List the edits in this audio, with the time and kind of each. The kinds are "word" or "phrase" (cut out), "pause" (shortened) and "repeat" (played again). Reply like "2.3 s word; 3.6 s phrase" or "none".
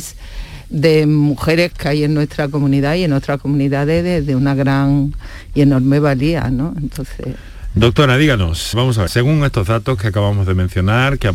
1.7 s word; 8.7 s word; 9.1 s word